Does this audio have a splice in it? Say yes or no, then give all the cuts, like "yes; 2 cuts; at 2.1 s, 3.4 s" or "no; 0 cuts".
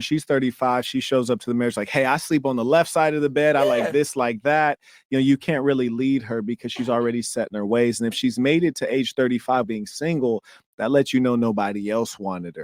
yes; 1 cut; at 9.6 s